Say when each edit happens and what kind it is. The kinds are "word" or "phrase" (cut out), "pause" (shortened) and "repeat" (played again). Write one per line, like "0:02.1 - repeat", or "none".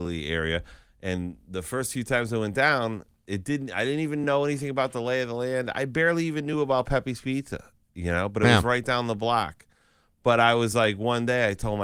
none